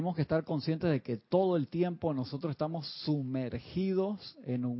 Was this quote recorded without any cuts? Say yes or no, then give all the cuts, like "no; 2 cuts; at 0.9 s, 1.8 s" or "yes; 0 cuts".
yes; 0 cuts